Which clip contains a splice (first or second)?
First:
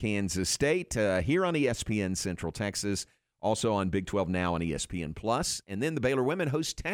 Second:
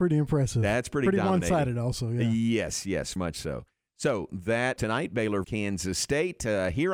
second